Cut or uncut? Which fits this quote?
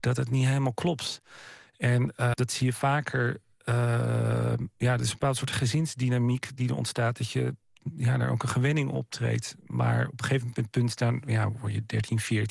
cut